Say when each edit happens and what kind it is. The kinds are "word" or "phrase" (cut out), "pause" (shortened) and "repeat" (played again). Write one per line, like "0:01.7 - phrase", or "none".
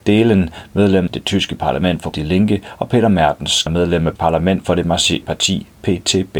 0:01.1 - word
0:02.1 - word
0:03.7 - word
0:04.2 - word
0:05.2 - word